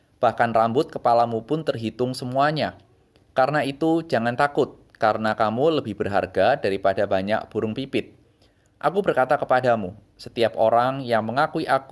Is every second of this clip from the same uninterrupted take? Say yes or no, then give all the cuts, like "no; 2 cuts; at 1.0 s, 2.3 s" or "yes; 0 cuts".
yes; 0 cuts